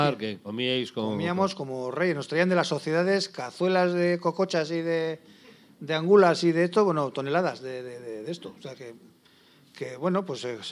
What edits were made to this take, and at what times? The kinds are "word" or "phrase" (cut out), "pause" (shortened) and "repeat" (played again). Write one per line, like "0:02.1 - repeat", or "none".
none